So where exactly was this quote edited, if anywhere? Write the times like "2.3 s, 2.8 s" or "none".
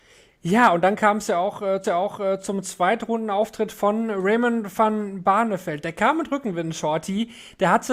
1.8 s

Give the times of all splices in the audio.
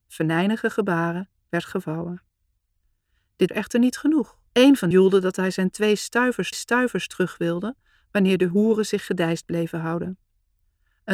3.5 s, 4.5 s, 4.9 s, 6.5 s

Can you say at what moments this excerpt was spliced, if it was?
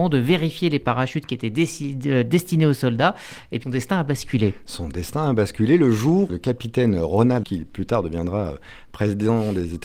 3.6 s, 6.3 s, 7.4 s

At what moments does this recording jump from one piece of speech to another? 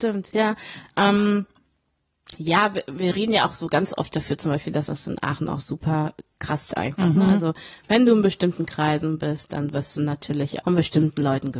6.7 s, 10.6 s

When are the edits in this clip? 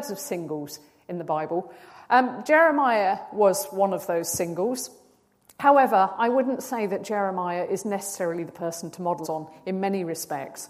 9.2 s

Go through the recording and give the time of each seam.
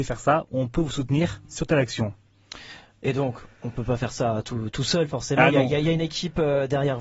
none

